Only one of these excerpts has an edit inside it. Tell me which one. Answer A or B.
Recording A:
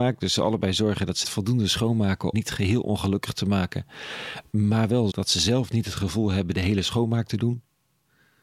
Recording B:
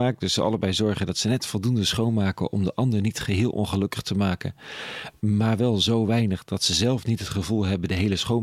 A